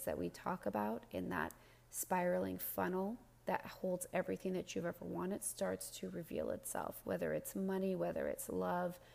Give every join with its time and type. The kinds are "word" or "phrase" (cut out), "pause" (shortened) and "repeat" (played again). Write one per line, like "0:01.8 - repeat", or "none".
none